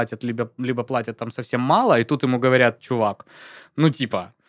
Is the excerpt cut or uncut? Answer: uncut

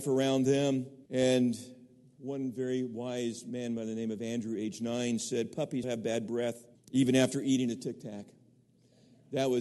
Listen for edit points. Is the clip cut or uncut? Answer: cut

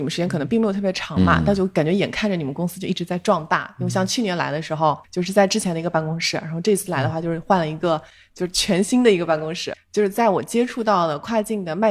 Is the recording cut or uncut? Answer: cut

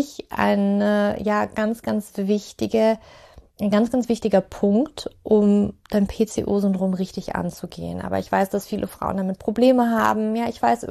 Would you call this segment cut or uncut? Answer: cut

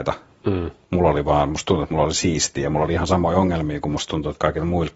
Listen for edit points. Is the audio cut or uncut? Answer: uncut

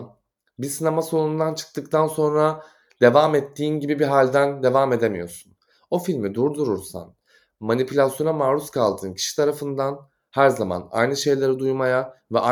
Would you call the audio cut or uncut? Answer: uncut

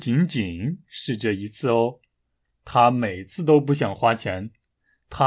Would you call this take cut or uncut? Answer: uncut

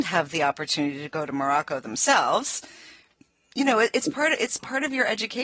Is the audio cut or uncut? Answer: uncut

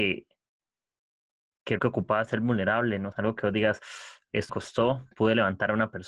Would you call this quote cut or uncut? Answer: cut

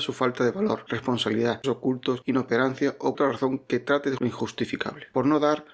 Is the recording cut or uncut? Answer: cut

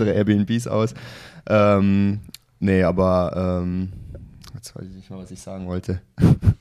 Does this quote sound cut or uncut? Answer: uncut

